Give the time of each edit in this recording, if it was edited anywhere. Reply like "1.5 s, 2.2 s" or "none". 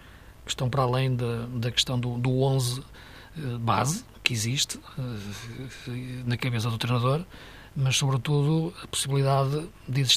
none